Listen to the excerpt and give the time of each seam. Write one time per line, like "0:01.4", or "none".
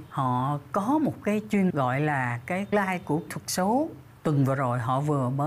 0:01.7
0:02.7
0:03.3